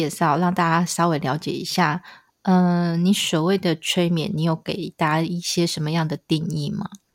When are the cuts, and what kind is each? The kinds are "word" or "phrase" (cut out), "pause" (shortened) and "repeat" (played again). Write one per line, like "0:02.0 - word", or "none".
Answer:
none